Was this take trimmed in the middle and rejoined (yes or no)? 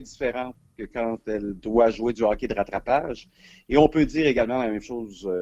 no